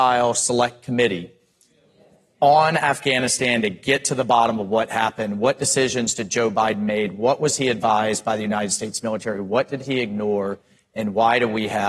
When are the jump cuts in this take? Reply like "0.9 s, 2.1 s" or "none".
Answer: none